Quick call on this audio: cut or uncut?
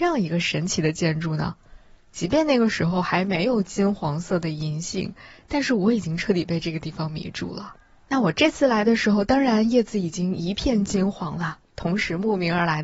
uncut